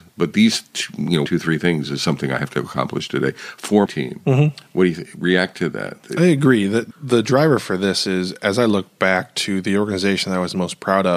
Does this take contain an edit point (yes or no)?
yes